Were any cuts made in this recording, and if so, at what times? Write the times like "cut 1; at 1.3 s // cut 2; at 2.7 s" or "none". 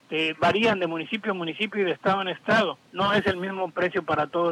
cut 1; at 2.9 s